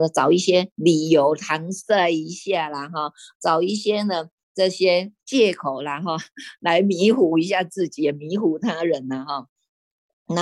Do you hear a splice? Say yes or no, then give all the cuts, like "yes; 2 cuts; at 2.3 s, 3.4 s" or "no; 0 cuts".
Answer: no; 0 cuts